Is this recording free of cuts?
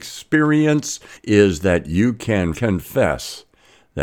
no; 2 cuts; at 1.2 s, 2.5 s

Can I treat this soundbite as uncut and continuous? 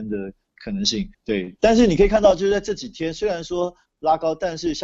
no; 1 cut; at 1.1 s

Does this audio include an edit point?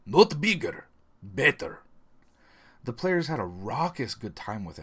no; 0 cuts

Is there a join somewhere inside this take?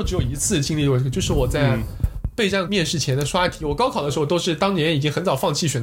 yes; 1 cut; at 2.7 s

